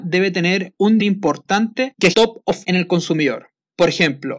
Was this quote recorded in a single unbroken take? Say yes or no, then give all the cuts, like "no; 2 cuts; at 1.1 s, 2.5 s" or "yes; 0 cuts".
no; 3 cuts; at 1.0 s, 2.1 s, 2.6 s